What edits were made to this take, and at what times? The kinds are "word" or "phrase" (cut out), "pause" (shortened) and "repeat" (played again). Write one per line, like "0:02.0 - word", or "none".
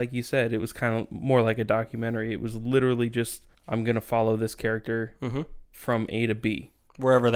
0:05.6 - pause